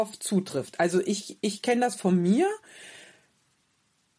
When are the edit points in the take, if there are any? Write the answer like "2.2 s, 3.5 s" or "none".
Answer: none